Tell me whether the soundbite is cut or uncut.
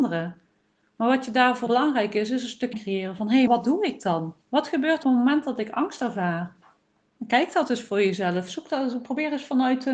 cut